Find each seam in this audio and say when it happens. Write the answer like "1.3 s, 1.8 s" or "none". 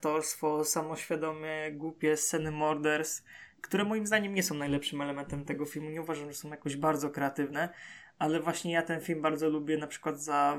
none

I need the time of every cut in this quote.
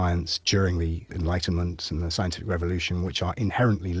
1.1 s

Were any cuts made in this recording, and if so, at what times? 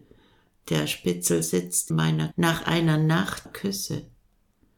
1.9 s, 2.3 s, 3.5 s

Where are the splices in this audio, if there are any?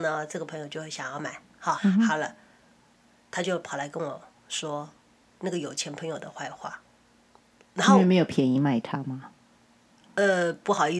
1.8 s

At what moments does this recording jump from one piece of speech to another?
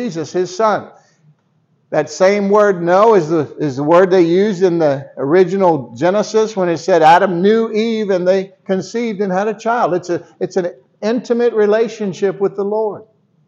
none

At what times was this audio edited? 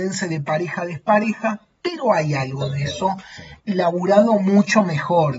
3.6 s

